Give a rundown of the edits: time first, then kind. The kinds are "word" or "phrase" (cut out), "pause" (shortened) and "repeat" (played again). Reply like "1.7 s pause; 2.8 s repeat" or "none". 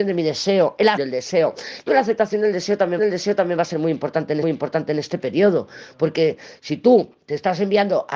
1.0 s word; 1.9 s word; 3.0 s repeat; 4.4 s repeat